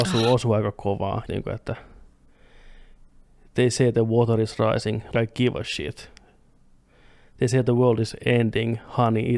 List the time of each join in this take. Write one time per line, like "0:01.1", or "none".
0:01.3
0:05.1